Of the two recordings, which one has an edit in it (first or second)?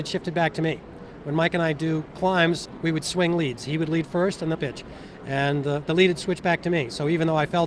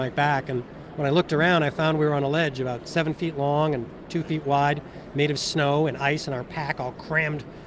first